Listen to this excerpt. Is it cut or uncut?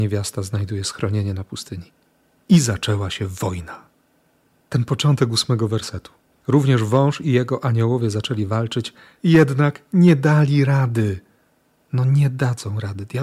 uncut